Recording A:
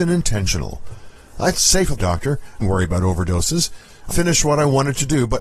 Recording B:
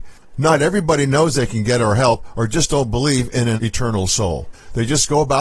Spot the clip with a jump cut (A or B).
A